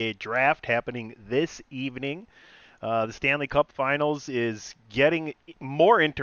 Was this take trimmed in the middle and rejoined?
no; 0 cuts

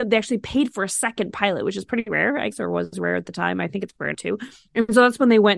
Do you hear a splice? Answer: yes; 2 cuts; at 2.5 s, 4.1 s

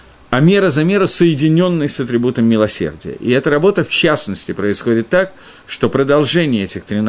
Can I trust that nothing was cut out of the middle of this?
yes; 0 cuts

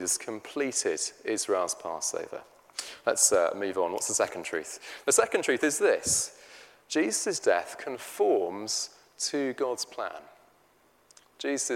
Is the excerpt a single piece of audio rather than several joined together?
yes; 0 cuts

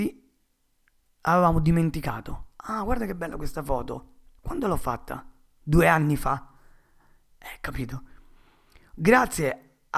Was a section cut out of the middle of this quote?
no; 0 cuts

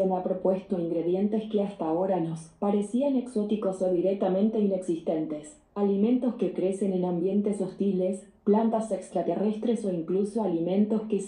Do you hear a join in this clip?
no; 0 cuts

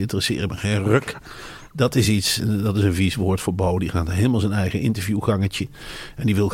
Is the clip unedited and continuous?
yes; 0 cuts

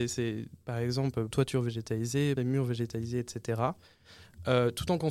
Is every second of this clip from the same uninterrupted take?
no; 2 cuts; at 1.3 s, 2.4 s

